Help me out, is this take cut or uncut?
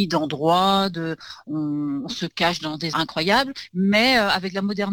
cut